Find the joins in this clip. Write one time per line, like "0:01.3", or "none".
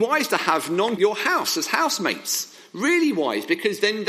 0:01.0